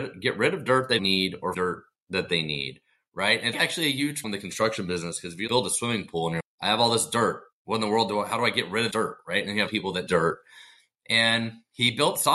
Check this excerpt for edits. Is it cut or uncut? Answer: cut